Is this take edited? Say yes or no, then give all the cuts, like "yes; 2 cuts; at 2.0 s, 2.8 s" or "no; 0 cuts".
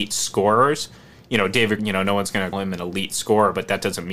yes; 2 cuts; at 1.8 s, 2.5 s